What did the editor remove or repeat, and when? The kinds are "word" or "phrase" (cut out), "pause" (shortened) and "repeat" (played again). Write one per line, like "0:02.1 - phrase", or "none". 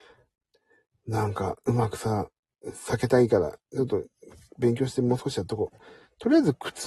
none